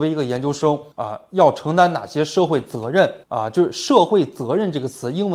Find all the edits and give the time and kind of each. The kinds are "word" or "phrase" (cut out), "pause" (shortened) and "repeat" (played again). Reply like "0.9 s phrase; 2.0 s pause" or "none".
0.9 s pause; 3.2 s pause